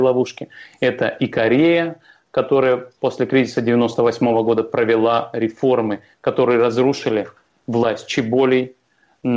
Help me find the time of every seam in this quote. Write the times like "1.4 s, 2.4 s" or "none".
none

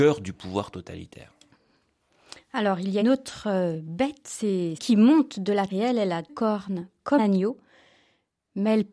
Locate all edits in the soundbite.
3.0 s, 4.8 s, 5.7 s, 6.3 s, 7.2 s

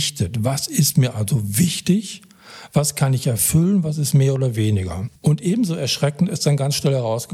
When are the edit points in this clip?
5.2 s

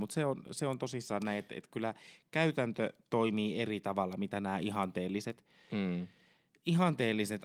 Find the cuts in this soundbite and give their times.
3.0 s

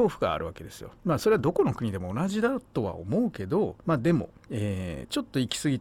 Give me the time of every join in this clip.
1.0 s, 3.8 s, 4.4 s

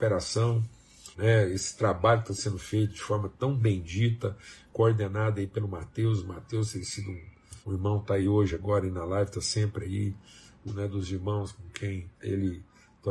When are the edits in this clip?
1.1 s, 7.6 s, 10.7 s, 12.1 s

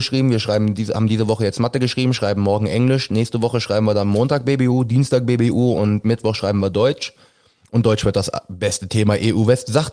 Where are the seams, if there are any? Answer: none

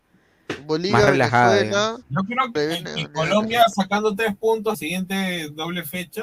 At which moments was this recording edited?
2.6 s, 4.7 s

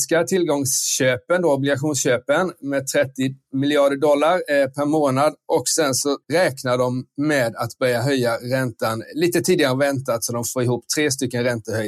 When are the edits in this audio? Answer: 6.2 s

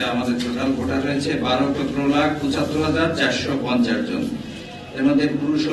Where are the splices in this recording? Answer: 1.7 s

